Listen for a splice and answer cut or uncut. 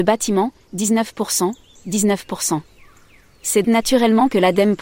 cut